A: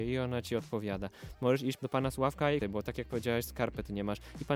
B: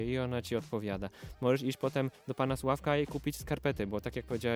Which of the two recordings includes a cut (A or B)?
A